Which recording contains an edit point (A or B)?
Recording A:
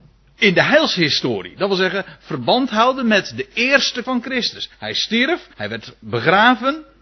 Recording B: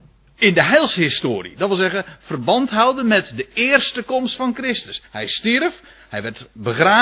A